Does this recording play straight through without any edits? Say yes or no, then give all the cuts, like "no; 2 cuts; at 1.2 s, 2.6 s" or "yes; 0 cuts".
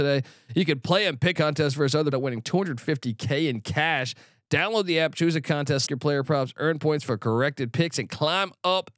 no; 3 cuts; at 1.4 s, 2.1 s, 5.9 s